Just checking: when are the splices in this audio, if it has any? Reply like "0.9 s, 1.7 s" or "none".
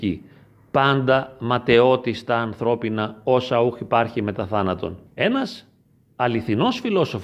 5.1 s